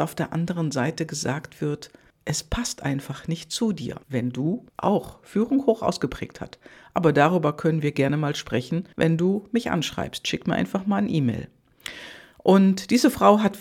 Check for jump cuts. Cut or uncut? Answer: cut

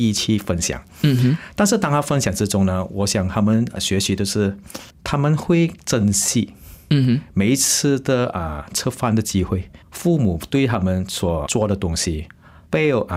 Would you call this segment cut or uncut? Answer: cut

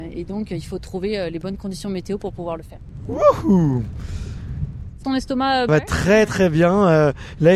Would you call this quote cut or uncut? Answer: cut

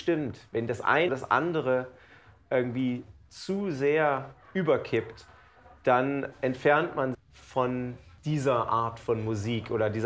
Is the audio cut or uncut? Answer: cut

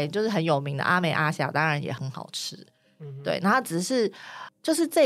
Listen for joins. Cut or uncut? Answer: uncut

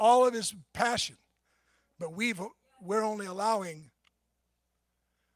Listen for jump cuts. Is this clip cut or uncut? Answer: uncut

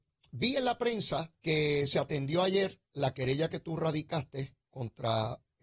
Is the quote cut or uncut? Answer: cut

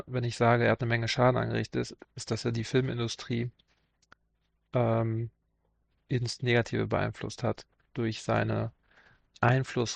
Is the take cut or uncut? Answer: uncut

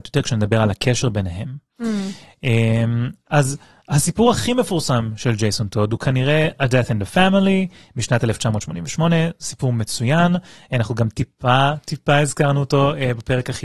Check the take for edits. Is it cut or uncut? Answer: uncut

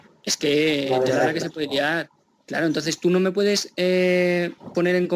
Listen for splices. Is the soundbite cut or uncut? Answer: uncut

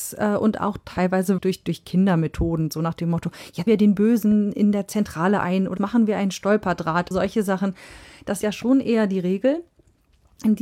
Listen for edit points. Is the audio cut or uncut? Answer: cut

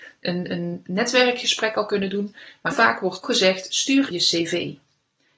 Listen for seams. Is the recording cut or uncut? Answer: cut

